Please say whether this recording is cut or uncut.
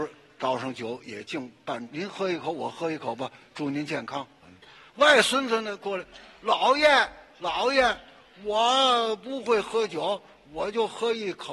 cut